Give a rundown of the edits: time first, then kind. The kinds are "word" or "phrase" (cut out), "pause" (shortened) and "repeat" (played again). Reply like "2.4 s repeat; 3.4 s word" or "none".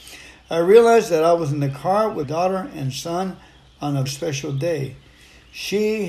2.2 s word; 4.1 s word